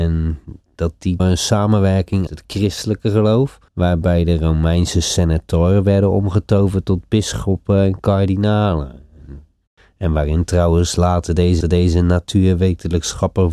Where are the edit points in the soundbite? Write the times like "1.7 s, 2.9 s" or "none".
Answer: 1.2 s, 2.3 s, 3.7 s, 11.6 s